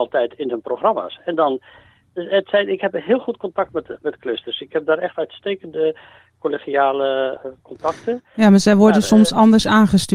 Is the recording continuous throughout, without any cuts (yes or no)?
yes